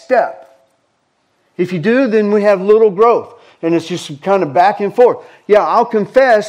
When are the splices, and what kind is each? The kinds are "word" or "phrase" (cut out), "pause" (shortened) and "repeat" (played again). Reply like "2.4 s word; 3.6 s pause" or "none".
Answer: none